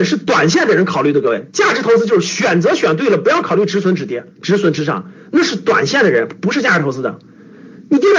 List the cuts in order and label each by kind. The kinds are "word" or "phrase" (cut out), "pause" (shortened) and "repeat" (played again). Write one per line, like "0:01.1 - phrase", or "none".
0:04.3 - pause